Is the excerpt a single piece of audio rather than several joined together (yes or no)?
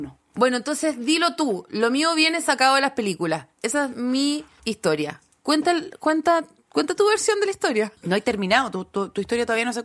yes